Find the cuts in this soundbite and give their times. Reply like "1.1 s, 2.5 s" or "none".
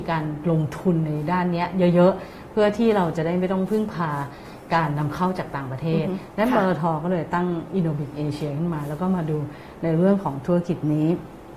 none